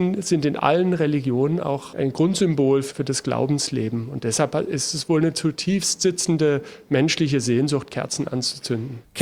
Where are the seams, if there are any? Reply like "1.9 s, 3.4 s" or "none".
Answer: none